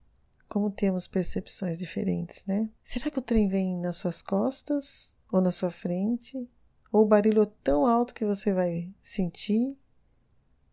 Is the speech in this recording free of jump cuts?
no; 2 cuts; at 2.8 s, 5.2 s

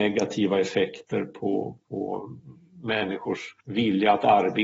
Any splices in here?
yes; 1 cut; at 3.6 s

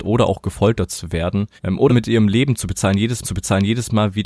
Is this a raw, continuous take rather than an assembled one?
no; 3 cuts; at 1.6 s, 1.9 s, 3.2 s

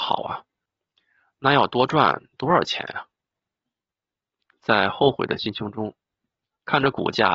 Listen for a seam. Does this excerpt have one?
no; 0 cuts

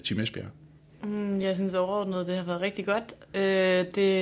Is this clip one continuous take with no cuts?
yes; 0 cuts

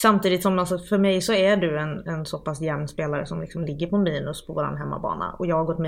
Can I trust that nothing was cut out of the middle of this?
yes; 0 cuts

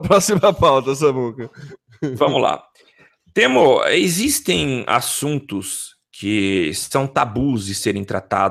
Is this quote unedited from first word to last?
yes; 0 cuts

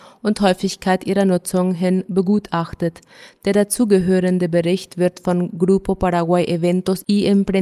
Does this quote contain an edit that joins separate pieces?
no; 0 cuts

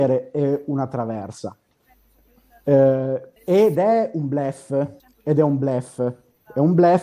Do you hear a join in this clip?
yes; 2 cuts; at 3.4 s, 5.0 s

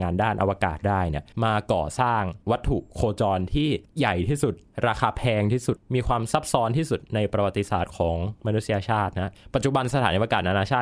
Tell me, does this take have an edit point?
yes; 2 cuts; at 1.3 s, 2.4 s

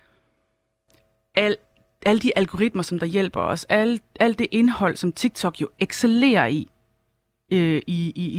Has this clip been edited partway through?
no; 0 cuts

